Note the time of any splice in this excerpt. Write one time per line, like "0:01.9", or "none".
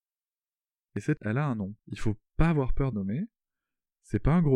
0:01.2
0:01.8
0:02.9